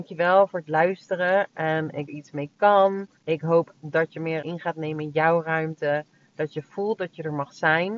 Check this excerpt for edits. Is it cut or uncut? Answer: cut